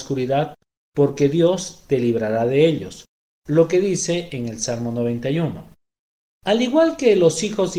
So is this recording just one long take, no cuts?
yes; 0 cuts

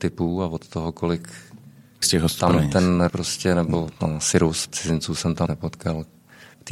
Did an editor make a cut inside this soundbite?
yes; 6 cuts; at 2.0 s, 2.4 s, 3.1 s, 4.0 s, 4.7 s, 5.5 s

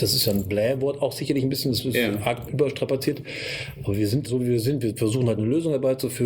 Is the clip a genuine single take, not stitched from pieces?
no; 2 cuts; at 2.5 s, 4.2 s

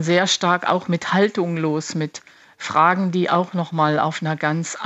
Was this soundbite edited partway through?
no; 0 cuts

